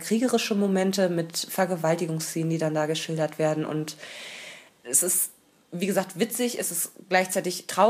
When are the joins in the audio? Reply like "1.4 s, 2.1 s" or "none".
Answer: none